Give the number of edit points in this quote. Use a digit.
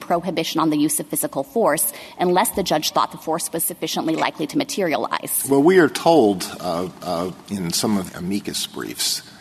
2